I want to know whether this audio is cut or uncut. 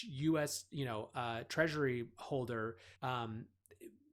cut